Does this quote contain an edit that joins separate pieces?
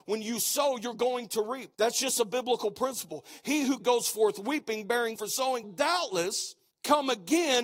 yes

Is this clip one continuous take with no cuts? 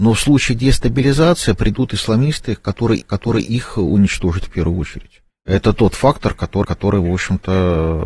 no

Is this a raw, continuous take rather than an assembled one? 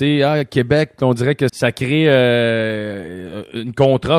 no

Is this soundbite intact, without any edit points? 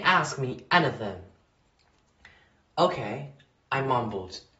yes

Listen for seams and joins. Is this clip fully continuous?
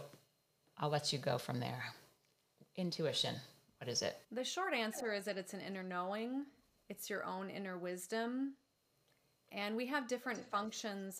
no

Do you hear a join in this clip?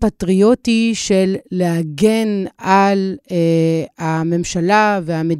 no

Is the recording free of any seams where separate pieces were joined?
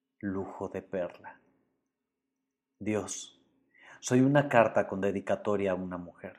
yes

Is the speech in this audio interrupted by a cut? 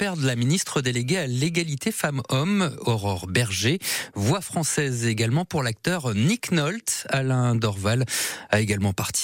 no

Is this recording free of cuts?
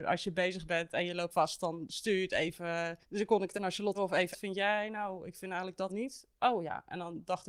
no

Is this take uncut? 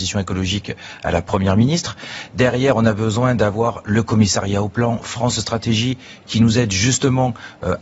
yes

